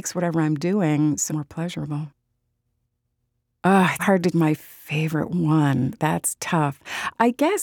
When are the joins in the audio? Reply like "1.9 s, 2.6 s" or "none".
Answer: 1.3 s, 4.0 s, 4.3 s